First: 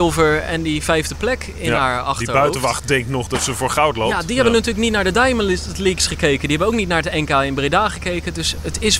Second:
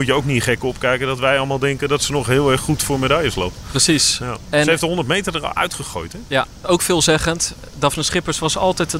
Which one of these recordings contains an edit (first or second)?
second